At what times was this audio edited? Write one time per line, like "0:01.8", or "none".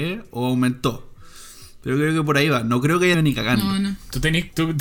0:03.1